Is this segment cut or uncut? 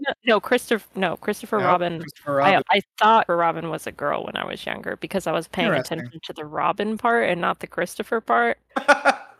cut